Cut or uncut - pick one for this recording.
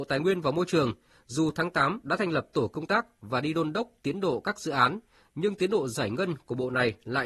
uncut